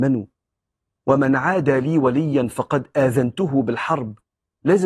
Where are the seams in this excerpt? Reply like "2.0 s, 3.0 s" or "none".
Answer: none